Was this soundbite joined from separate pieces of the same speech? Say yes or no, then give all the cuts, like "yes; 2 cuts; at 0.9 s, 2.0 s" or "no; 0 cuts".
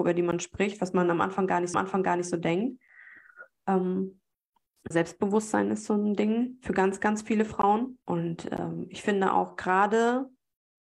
yes; 3 cuts; at 1.7 s, 4.9 s, 8.0 s